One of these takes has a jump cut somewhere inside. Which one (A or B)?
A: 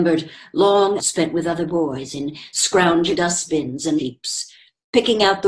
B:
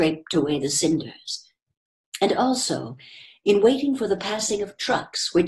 A